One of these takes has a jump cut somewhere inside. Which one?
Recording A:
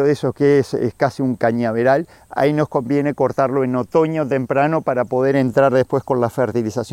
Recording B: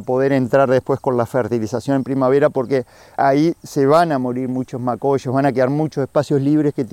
B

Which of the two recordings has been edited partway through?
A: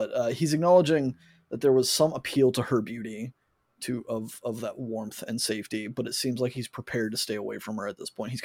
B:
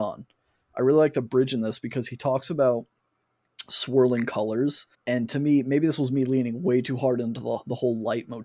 B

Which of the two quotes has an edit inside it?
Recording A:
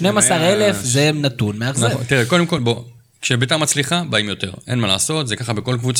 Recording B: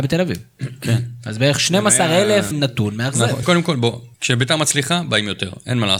B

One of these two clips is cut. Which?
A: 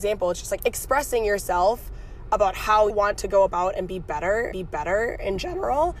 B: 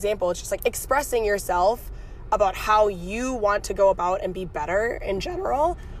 A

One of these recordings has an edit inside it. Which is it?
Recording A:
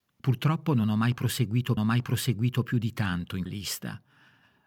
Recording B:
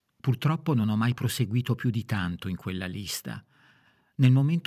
A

